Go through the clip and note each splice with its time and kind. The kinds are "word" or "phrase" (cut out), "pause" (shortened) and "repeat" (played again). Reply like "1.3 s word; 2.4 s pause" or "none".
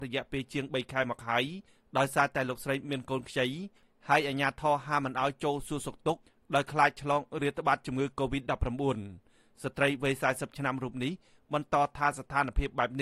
none